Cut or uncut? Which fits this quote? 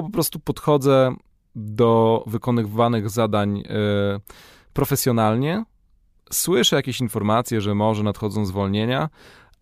uncut